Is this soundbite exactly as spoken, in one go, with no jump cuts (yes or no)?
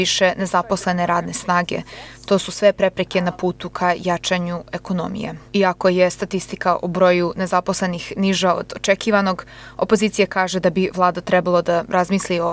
no